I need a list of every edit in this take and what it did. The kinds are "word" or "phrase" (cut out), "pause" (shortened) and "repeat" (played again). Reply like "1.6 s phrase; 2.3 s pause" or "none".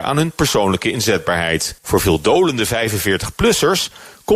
1.8 s pause